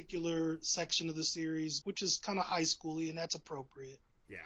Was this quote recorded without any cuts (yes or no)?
no